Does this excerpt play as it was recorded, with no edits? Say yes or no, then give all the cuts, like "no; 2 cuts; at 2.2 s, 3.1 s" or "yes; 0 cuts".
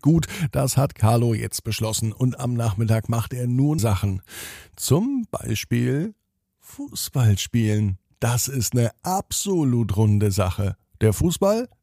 no; 1 cut; at 3.8 s